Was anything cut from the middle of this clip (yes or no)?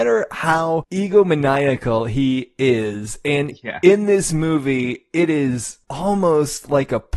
no